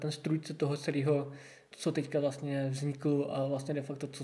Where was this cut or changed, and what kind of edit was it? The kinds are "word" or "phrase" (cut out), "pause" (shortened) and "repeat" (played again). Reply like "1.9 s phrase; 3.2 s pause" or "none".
none